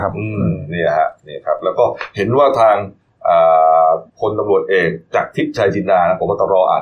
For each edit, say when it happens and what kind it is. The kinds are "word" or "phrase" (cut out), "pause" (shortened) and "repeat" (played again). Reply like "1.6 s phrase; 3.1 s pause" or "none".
4.1 s pause